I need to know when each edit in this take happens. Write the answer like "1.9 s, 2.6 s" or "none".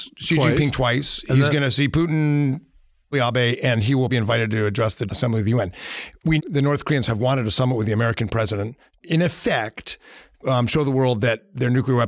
3.1 s, 4.1 s, 5.1 s, 6.4 s, 9.0 s, 10.4 s